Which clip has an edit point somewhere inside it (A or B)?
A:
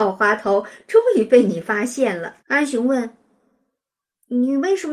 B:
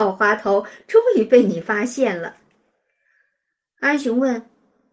A